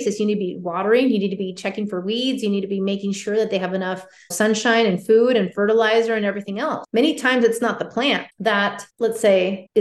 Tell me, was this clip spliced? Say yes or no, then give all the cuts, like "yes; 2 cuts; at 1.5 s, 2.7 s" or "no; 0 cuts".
no; 0 cuts